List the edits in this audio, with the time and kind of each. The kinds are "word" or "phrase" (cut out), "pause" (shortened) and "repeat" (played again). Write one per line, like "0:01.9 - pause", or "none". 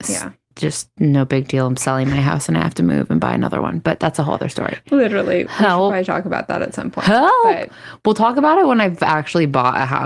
none